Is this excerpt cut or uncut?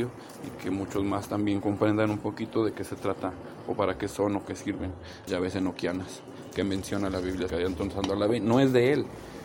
cut